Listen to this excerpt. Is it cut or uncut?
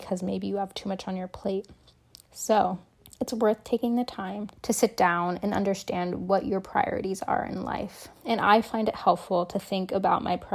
cut